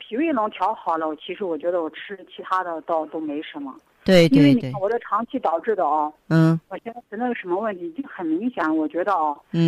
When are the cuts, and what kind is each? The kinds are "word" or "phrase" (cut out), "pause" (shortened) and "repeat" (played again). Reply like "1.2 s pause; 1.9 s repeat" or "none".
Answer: none